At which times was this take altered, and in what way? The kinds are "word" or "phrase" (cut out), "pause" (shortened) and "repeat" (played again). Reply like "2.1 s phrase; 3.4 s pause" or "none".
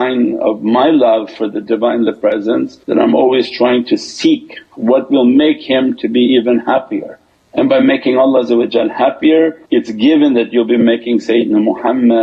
2.8 s pause; 7.3 s pause; 9.6 s pause